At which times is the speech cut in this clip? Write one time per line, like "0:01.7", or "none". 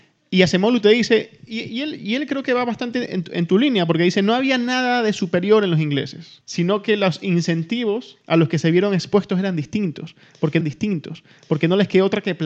0:10.6